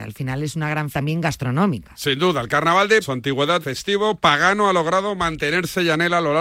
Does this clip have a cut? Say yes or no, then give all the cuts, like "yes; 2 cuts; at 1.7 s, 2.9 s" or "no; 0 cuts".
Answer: yes; 3 cuts; at 0.9 s, 3.0 s, 3.6 s